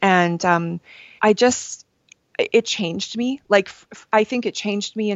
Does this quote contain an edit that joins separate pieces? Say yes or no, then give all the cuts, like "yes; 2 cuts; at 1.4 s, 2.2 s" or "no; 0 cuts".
yes; 1 cut; at 1.2 s